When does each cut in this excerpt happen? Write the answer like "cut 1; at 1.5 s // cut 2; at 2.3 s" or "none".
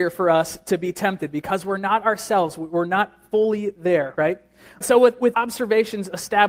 cut 1; at 4.8 s // cut 2; at 5.3 s

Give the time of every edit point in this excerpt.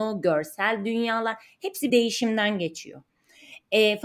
cut 1; at 1.9 s

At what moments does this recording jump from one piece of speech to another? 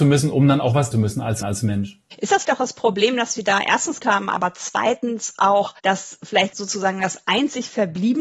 cut 1; at 0.9 s // cut 2; at 1.4 s // cut 3; at 2.1 s // cut 4; at 2.4 s // cut 5; at 4.0 s // cut 6; at 5.8 s // cut 7; at 6.5 s

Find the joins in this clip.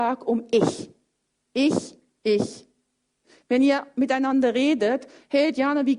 none

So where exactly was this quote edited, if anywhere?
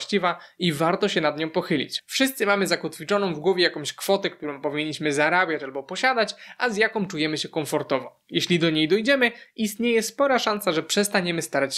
none

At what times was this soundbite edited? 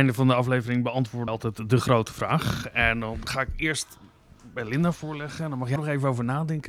cut 1; at 1.3 s // cut 2; at 5.8 s

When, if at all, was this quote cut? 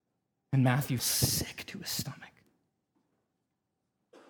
cut 1; at 1.0 s

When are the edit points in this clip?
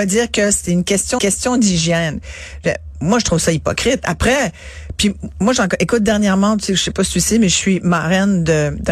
cut 1; at 1.2 s

